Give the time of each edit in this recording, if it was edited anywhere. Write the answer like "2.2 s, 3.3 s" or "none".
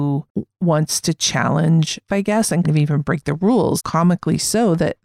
2.1 s, 2.6 s, 3.8 s